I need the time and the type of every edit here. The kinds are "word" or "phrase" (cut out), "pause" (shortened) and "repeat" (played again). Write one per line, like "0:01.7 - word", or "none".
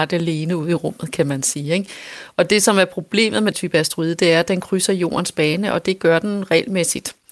0:03.5 - phrase